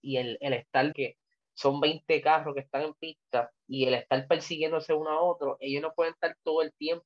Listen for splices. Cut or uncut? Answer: cut